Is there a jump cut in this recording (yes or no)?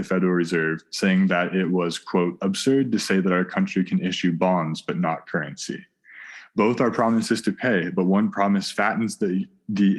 no